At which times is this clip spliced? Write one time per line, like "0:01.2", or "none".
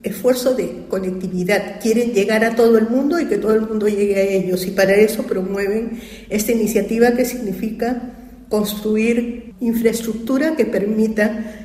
none